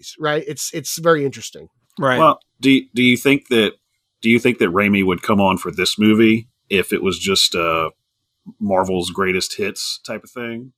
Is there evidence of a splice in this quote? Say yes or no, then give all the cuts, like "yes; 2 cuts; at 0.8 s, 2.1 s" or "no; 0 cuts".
yes; 1 cut; at 2.5 s